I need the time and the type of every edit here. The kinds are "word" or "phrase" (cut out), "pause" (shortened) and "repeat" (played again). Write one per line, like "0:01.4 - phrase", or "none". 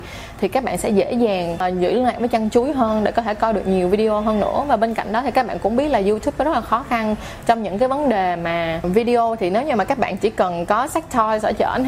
none

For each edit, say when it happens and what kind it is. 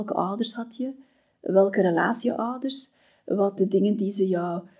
0:02.2 - word
0:03.6 - word

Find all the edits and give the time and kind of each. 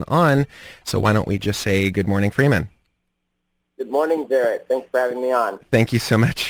none

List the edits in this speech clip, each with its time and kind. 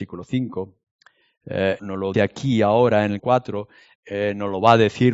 0:01.8 - word
0:02.1 - word
0:03.2 - word

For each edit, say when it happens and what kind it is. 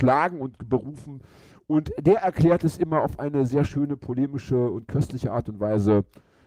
none

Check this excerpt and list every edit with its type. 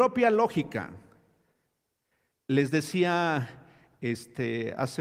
none

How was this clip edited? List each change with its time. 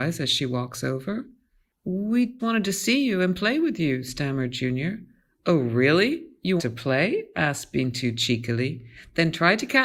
0:02.4 - word
0:06.6 - word

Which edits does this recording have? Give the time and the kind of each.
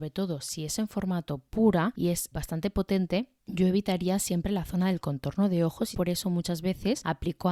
0:02.3 - word
0:05.9 - phrase

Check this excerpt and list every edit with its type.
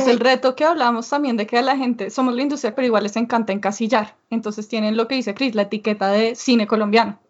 0:02.7 - word

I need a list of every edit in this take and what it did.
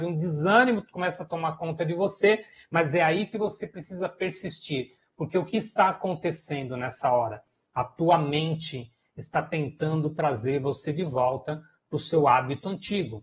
none

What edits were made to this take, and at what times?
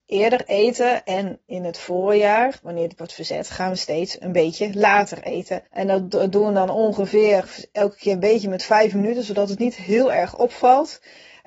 0:03.0 - word
0:05.7 - pause

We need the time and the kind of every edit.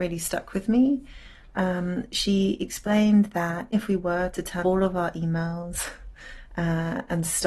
0:03.7 - word
0:04.6 - word

